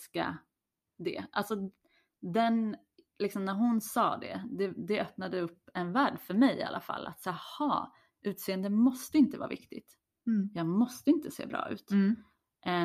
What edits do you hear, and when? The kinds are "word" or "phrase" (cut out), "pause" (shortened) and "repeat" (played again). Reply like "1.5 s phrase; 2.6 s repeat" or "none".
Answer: none